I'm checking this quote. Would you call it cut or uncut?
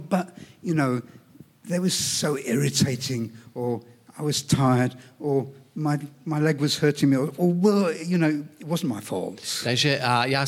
uncut